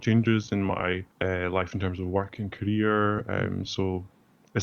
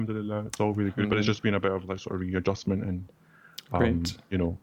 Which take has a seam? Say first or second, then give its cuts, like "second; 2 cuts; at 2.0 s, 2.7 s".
first; 1 cut; at 1.1 s